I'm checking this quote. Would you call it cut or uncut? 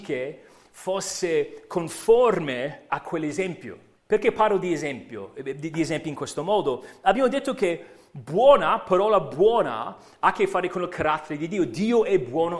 cut